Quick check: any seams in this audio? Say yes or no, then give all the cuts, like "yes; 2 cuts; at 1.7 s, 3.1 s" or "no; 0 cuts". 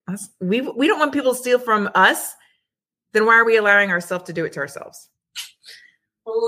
no; 0 cuts